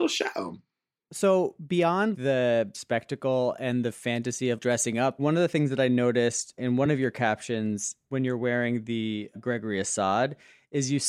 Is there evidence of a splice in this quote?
no; 0 cuts

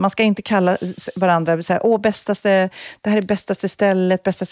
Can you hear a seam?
no; 0 cuts

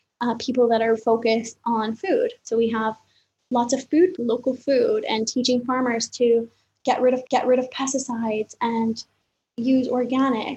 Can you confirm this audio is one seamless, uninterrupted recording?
no; 4 cuts; at 1.0 s, 2.4 s, 4.2 s, 7.3 s

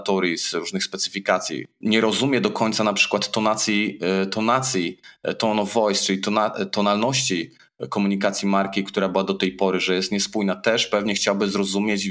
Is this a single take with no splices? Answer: yes; 0 cuts

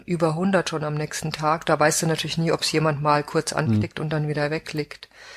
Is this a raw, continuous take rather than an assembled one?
yes; 0 cuts

